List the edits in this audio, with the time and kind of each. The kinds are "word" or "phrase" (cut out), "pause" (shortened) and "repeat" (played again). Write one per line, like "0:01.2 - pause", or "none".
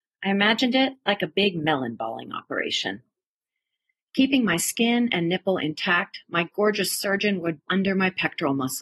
0:07.7 - word